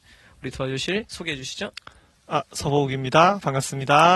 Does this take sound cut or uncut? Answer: uncut